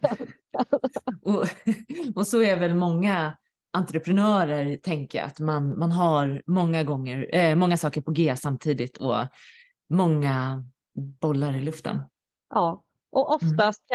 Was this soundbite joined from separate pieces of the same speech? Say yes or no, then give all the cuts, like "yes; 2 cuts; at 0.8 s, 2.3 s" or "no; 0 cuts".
no; 0 cuts